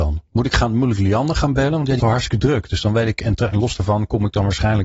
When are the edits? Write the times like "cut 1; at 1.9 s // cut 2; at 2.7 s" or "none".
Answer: cut 1; at 2.0 s